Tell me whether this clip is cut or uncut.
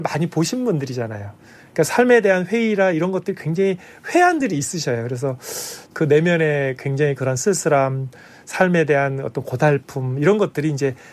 uncut